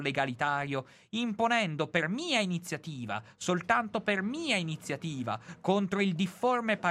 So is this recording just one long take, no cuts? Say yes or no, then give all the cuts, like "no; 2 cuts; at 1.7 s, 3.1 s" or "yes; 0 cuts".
yes; 0 cuts